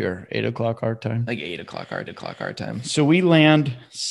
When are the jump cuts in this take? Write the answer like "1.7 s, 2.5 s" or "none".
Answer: 2.1 s